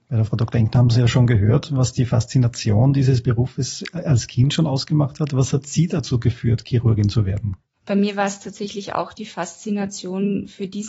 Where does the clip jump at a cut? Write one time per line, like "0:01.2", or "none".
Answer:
none